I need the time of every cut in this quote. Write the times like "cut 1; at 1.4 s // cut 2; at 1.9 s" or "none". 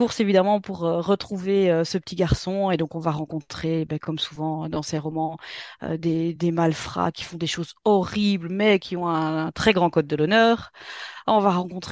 none